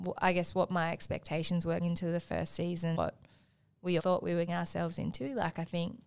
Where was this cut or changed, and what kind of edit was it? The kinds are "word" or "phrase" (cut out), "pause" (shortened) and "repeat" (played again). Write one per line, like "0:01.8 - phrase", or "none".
0:01.8 - word
0:03.0 - word
0:04.0 - word
0:04.5 - word